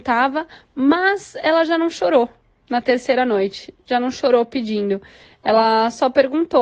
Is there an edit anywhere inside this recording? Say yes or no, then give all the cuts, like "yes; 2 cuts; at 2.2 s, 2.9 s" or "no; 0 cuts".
no; 0 cuts